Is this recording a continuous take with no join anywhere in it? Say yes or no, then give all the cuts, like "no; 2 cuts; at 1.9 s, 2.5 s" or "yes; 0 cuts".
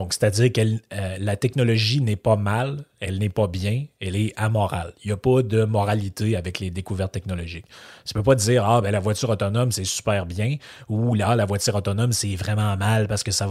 yes; 0 cuts